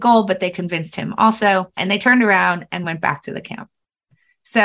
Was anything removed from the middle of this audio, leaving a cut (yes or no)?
no